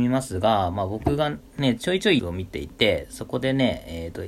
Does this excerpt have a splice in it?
yes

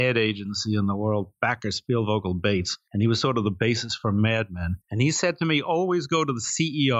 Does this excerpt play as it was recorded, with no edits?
no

